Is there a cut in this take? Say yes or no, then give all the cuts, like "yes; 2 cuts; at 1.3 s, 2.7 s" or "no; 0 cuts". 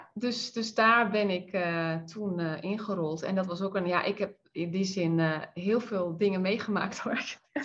no; 0 cuts